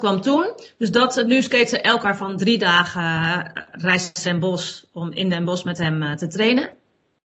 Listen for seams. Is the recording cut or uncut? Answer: cut